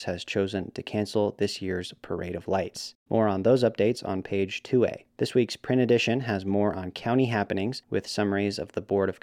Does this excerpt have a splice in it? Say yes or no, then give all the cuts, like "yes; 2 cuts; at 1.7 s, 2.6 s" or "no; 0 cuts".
yes; 3 cuts; at 3.0 s, 5.1 s, 7.8 s